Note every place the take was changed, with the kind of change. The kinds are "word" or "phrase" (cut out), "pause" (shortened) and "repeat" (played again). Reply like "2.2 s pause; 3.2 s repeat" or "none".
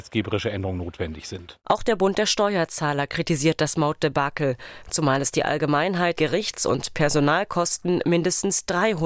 6.1 s word